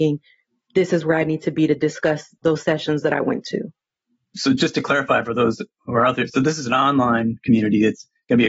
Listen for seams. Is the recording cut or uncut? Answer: uncut